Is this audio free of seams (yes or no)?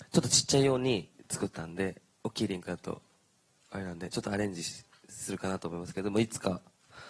yes